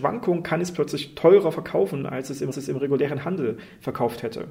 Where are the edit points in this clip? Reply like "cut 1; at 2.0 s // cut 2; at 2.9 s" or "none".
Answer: cut 1; at 2.5 s